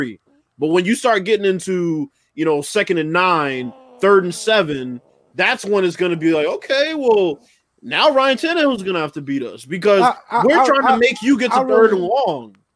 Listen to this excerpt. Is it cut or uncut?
uncut